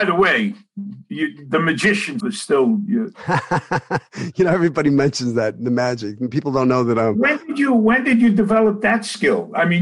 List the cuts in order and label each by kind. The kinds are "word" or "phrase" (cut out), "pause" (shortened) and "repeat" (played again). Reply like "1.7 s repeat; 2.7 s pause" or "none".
2.2 s word